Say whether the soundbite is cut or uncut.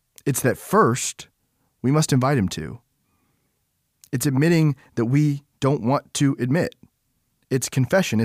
uncut